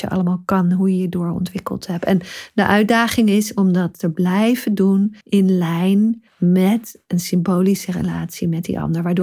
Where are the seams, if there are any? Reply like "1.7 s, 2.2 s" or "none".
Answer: 5.2 s, 6.3 s